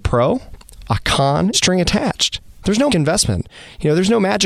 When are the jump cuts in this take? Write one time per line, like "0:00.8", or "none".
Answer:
0:01.5
0:02.6
0:02.9